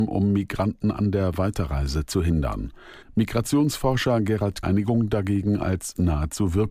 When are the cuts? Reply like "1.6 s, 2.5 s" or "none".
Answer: 3.0 s, 4.6 s